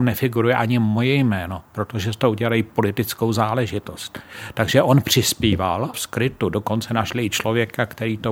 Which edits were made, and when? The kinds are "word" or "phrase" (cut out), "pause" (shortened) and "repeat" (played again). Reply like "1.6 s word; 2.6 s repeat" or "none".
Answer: 5.9 s phrase